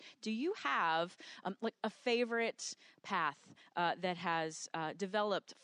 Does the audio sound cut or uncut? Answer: uncut